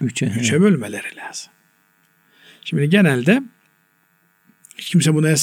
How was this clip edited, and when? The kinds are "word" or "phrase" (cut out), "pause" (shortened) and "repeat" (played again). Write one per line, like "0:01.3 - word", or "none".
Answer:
none